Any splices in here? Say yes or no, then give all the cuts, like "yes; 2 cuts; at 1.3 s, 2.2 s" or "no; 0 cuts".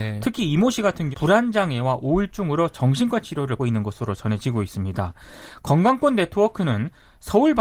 yes; 2 cuts; at 1.1 s, 3.6 s